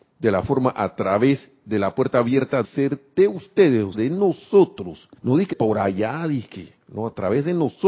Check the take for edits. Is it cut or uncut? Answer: cut